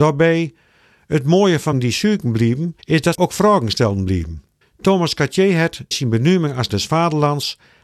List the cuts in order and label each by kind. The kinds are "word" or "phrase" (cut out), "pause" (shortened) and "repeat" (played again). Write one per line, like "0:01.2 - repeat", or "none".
0:01.7 - word
0:02.8 - pause
0:03.1 - word
0:04.6 - pause
0:05.9 - word
0:06.7 - word